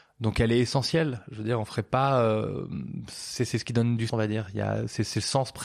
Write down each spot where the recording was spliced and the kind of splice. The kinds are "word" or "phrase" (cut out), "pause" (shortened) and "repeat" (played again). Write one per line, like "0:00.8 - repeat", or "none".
0:04.1 - word